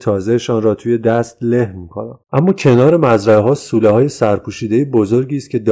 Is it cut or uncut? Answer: cut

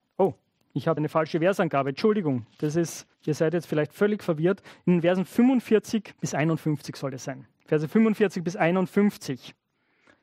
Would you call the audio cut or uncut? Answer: cut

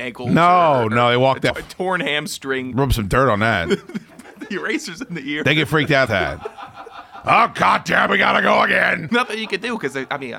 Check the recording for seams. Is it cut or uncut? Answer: cut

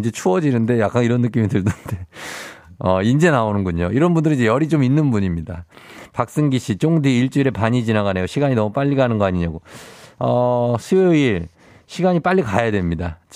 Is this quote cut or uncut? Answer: uncut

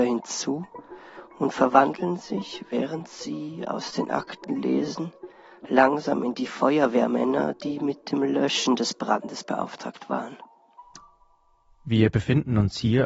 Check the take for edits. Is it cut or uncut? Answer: uncut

